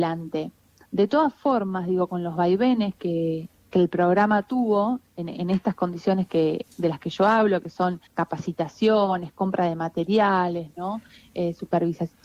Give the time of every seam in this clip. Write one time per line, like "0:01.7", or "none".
0:08.1